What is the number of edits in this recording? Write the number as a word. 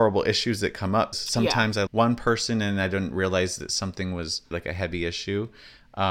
three